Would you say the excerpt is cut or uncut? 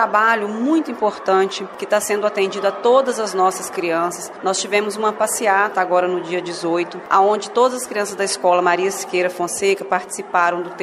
uncut